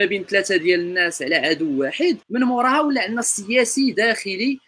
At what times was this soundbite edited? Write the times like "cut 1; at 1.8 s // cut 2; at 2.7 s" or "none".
cut 1; at 2.2 s // cut 2; at 3.2 s